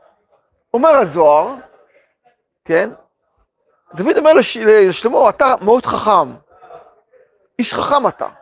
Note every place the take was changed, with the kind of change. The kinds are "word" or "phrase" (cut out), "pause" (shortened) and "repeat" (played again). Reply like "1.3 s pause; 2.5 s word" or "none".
none